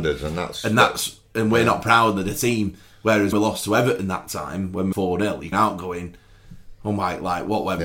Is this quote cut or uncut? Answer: cut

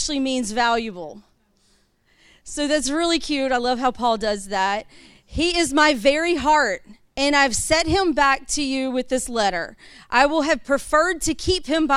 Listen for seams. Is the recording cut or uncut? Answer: uncut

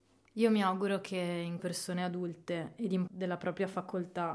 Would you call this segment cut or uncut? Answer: cut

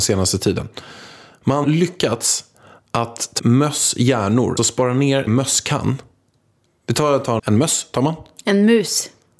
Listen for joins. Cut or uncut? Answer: cut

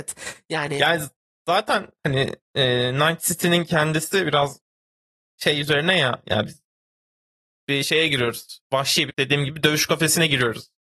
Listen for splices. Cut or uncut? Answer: cut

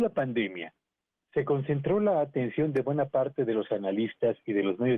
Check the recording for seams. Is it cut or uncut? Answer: uncut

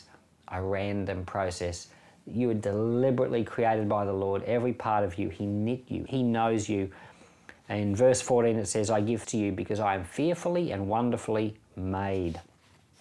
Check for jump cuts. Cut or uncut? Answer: cut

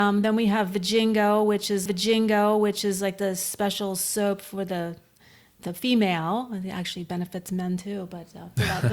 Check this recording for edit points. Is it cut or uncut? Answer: cut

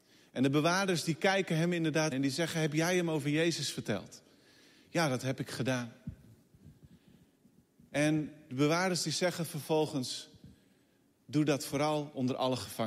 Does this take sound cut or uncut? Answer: cut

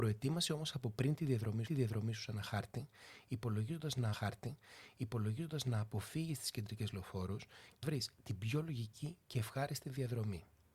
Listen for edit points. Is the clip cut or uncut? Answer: cut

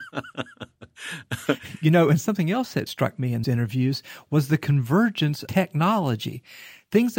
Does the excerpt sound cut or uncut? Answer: cut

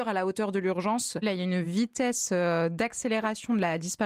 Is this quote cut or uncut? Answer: uncut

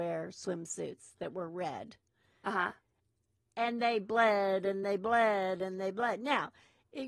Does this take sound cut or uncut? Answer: uncut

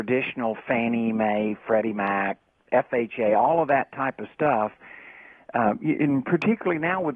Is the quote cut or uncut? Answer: uncut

